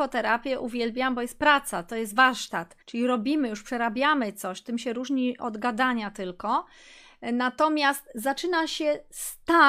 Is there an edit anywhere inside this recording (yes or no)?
yes